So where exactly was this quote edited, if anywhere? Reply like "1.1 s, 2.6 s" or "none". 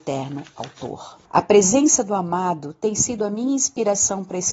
1.2 s